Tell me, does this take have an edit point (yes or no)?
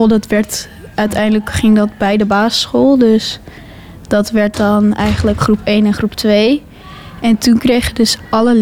no